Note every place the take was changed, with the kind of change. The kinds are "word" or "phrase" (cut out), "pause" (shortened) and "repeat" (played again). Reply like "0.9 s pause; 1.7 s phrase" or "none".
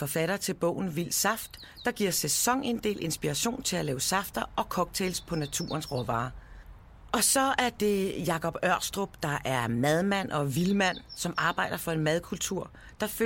none

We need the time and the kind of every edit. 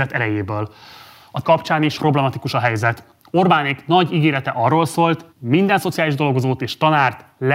1.4 s word; 2.0 s word; 5.3 s pause

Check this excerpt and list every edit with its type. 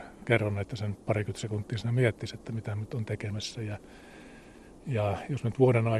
none

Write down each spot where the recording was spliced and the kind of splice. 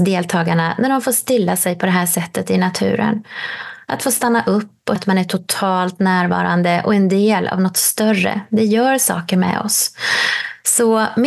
5.0 s word

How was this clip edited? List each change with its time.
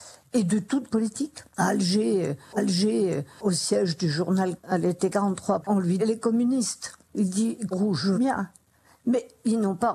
0.9 s word; 1.5 s pause; 2.6 s repeat; 4.6 s phrase; 6.0 s word; 7.7 s phrase; 8.1 s word

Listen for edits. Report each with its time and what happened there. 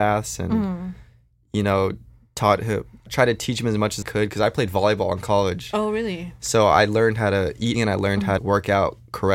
3.1 s word; 4.0 s word; 7.7 s word; 8.4 s word

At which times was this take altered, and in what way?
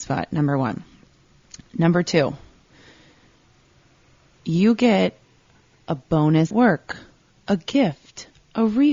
6.5 s word

